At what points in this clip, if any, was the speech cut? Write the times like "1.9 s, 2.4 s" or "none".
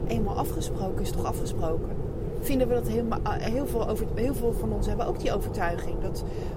none